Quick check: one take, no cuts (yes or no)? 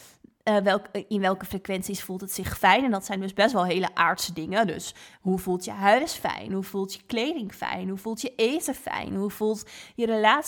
yes